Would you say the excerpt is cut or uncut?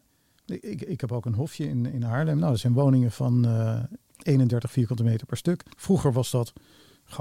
cut